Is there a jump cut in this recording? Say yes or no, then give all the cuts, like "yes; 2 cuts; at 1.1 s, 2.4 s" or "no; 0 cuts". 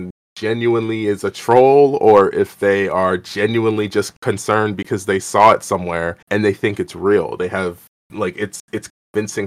yes; 2 cuts; at 6.2 s, 8.0 s